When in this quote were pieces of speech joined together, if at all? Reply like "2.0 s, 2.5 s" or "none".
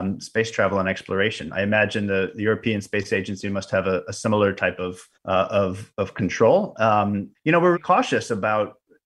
5.1 s, 7.3 s, 7.7 s